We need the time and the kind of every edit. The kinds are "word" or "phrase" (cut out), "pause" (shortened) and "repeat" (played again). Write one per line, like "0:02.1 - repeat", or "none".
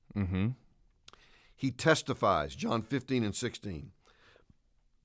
none